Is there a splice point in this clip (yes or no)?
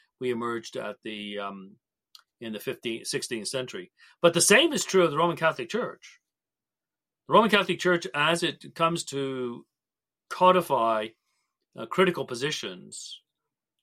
no